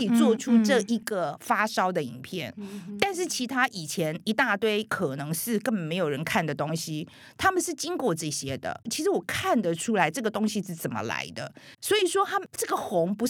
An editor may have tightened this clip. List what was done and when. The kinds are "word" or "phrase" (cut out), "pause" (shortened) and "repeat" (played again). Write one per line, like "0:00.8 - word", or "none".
0:08.8 - pause
0:11.7 - pause